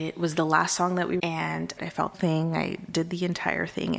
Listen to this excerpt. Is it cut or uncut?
cut